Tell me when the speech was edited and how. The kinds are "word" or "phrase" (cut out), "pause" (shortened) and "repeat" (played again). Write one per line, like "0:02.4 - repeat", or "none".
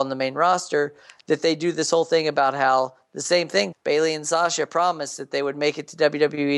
0:03.7 - word